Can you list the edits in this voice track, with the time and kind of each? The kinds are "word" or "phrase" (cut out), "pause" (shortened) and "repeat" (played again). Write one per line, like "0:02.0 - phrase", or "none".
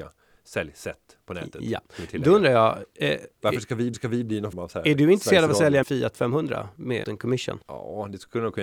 0:03.9 - repeat
0:04.5 - word
0:05.8 - word
0:07.0 - word
0:07.6 - pause